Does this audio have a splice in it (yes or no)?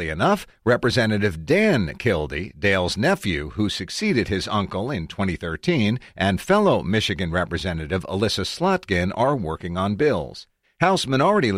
yes